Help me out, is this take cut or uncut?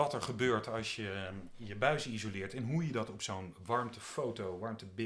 uncut